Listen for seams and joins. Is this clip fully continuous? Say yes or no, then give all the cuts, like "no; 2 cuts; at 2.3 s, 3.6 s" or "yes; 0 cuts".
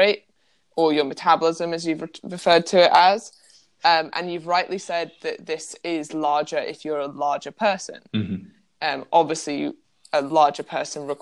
yes; 0 cuts